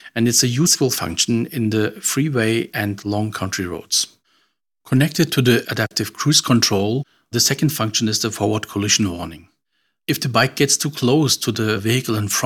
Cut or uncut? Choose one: uncut